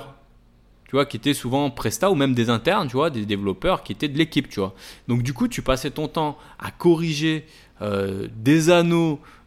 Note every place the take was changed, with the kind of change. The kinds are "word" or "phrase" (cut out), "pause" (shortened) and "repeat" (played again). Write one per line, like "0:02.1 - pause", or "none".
none